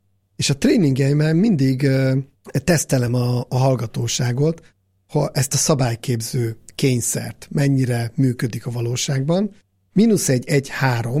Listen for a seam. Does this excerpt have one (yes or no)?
no